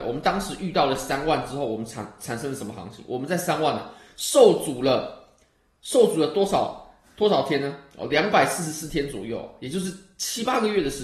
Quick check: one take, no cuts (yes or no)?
yes